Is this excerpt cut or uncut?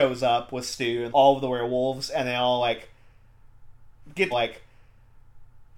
cut